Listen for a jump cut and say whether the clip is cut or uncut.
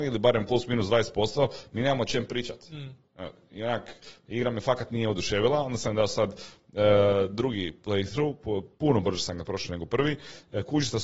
uncut